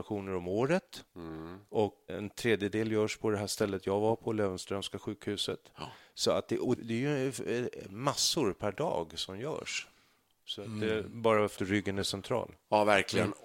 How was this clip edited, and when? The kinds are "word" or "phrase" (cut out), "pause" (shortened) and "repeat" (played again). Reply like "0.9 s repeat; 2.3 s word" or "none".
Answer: 2.1 s word; 6.8 s word; 11.6 s word